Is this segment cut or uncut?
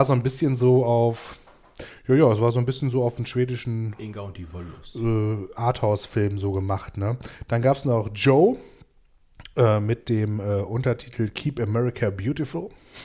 uncut